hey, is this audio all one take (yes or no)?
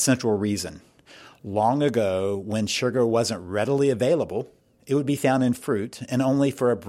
yes